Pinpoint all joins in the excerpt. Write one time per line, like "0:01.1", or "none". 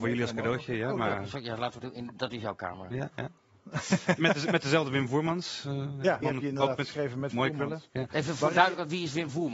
0:01.8
0:04.2
0:06.2